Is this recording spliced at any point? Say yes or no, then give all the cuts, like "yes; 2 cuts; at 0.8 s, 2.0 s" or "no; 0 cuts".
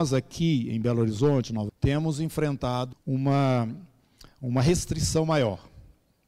yes; 2 cuts; at 1.7 s, 2.9 s